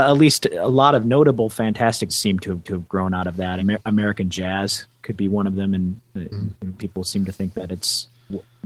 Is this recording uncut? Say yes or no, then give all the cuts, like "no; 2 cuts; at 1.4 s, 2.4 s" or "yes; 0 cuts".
no; 4 cuts; at 2.1 s, 2.7 s, 3.6 s, 6.8 s